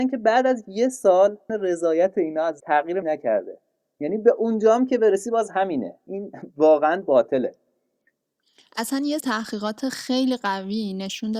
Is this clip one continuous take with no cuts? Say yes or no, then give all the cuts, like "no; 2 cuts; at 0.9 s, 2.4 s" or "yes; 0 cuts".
no; 6 cuts; at 1.5 s, 2.6 s, 3.0 s, 6.1 s, 7.0 s, 9.2 s